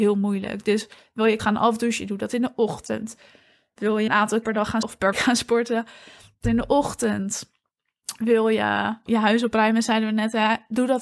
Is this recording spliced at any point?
yes; 7 cuts; at 1.4 s, 4.1 s, 4.4 s, 4.8 s, 5.1 s, 6.4 s, 9.1 s

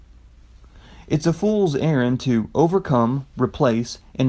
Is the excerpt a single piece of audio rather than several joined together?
yes; 0 cuts

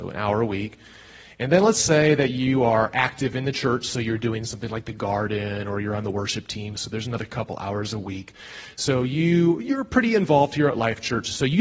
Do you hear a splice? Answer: no; 0 cuts

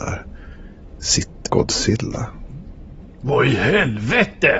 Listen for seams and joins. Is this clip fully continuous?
no; 1 cut; at 1.5 s

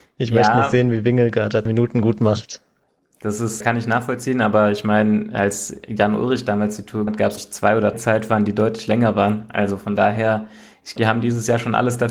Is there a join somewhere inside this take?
yes; 6 cuts; at 1.7 s, 3.6 s, 7.1 s, 7.4 s, 7.9 s, 11.0 s

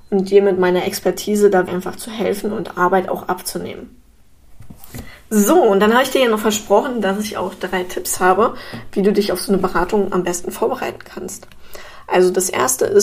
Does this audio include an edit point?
yes; 1 cut; at 1.7 s

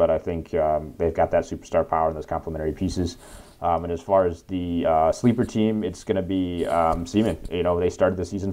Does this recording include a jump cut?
no; 0 cuts

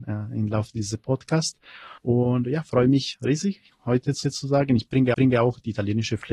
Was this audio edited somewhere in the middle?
yes; 3 cuts; at 2.0 s, 4.2 s, 5.1 s

